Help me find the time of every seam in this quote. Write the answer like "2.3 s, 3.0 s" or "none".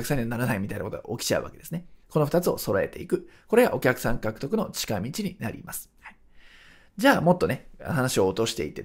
2.0 s, 5.9 s